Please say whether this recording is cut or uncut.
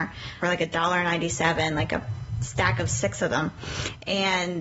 uncut